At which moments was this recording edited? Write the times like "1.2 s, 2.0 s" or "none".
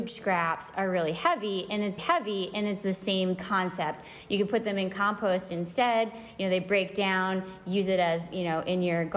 2.0 s